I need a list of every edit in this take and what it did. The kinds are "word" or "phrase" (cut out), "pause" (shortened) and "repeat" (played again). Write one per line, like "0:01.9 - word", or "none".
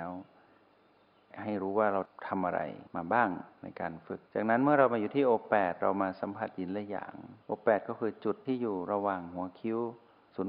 0:02.9 - pause
0:04.3 - pause
0:07.4 - pause